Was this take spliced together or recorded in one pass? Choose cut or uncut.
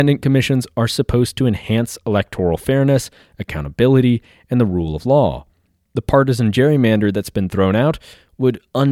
uncut